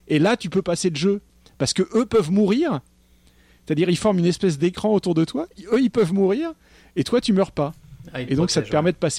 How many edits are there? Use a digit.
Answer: 0